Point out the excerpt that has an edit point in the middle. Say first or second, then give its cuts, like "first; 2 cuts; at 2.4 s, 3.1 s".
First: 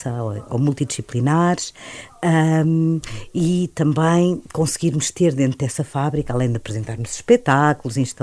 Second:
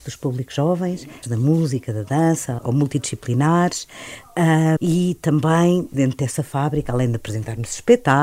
second; 4 cuts; at 1.2 s, 2.6 s, 4.8 s, 5.9 s